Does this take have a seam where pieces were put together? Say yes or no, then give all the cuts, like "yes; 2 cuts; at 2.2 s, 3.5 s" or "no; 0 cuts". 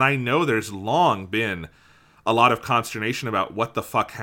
no; 0 cuts